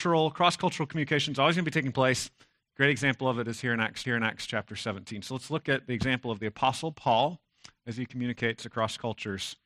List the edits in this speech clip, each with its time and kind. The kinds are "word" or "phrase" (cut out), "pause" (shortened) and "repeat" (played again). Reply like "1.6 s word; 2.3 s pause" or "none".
4.0 s repeat